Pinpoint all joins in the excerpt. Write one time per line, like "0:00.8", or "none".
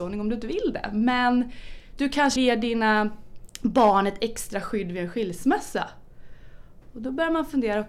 0:02.4